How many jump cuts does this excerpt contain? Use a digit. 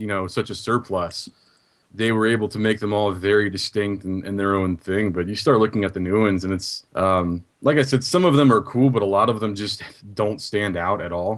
1